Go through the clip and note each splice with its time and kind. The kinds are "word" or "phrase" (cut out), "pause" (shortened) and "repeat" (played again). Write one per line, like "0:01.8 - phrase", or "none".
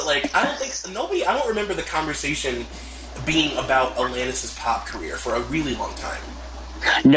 none